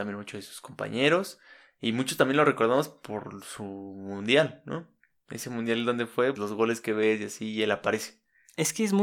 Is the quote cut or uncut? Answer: cut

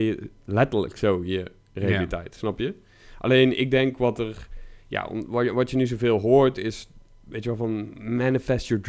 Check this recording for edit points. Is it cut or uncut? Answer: uncut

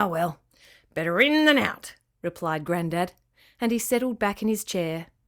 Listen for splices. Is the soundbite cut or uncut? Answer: uncut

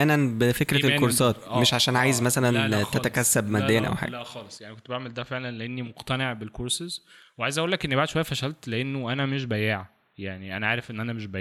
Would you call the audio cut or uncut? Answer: uncut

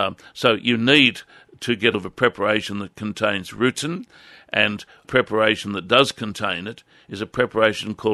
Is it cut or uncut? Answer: cut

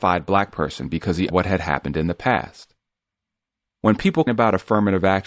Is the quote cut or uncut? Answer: cut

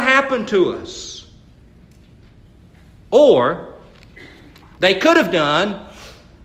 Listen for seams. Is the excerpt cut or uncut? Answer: uncut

